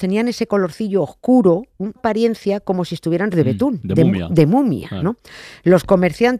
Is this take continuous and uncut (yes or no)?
no